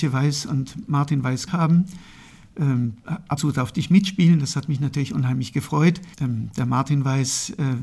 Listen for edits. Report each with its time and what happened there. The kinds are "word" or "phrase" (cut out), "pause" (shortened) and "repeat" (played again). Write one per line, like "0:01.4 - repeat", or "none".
0:01.5 - word
0:03.4 - word
0:06.1 - pause